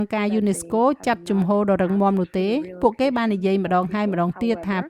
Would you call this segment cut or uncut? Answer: uncut